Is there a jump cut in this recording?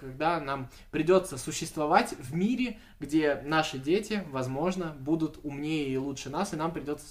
no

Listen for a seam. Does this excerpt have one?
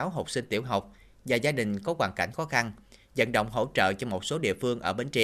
no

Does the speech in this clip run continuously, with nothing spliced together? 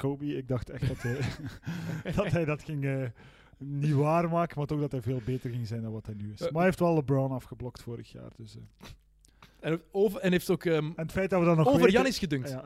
yes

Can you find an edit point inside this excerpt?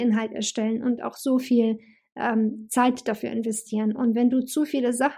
no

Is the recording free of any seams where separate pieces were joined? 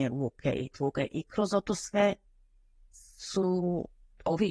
yes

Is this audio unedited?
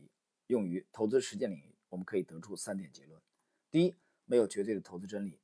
yes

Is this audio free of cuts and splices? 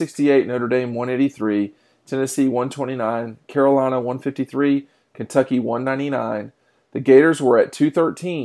yes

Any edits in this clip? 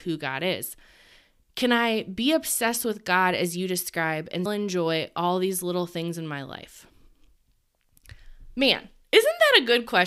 yes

